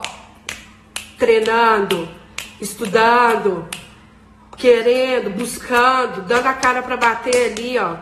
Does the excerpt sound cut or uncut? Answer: uncut